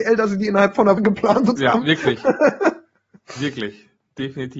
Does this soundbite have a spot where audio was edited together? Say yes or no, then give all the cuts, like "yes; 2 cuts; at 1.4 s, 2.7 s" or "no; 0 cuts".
yes; 2 cuts; at 1.0 s, 1.6 s